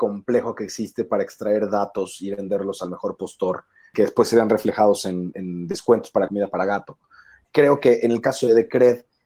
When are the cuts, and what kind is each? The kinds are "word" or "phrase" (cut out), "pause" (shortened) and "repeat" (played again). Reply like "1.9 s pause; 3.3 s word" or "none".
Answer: none